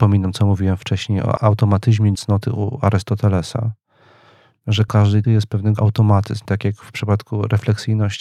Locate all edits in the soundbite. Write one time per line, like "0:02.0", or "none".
0:01.4
0:02.2
0:04.9
0:05.2
0:05.8
0:06.5